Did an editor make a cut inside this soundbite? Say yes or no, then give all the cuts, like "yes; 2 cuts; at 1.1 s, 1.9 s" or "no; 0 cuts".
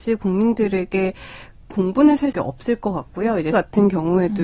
yes; 3 cuts; at 1.7 s, 2.3 s, 3.5 s